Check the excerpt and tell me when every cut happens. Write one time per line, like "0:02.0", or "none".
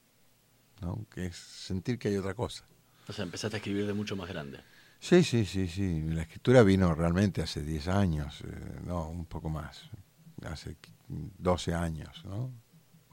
none